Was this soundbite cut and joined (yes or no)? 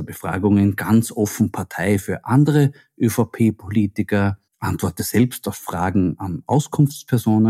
yes